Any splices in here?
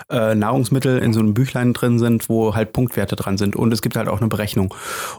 no; 0 cuts

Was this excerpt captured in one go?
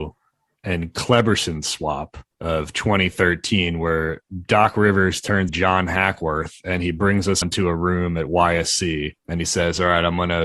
no; 4 cuts; at 2.3 s, 5.5 s, 7.4 s, 9.2 s

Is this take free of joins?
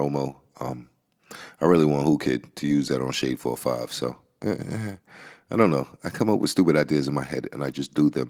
yes; 0 cuts

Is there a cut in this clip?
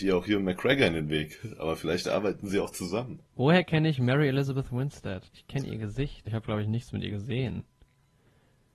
yes; 3 cuts; at 3.3 s, 5.3 s, 6.3 s

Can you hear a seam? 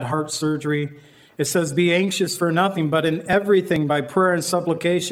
no; 0 cuts

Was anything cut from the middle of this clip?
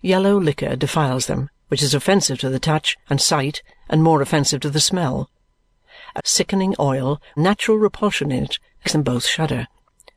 yes; 5 cuts; at 1.6 s, 3.0 s, 6.2 s, 7.4 s, 8.8 s

